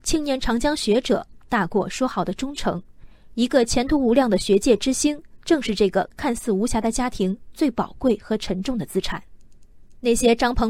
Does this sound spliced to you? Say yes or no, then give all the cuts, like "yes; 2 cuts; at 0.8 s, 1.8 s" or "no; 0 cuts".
no; 0 cuts